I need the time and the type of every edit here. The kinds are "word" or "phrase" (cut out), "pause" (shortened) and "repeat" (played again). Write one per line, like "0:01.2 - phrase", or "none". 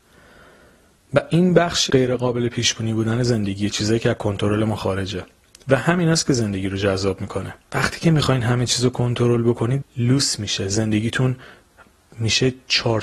0:01.9 - word
0:07.6 - pause
0:09.8 - word